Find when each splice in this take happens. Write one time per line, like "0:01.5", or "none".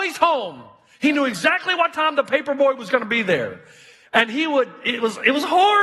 none